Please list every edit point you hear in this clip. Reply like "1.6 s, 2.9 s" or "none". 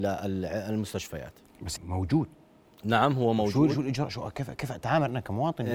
1.8 s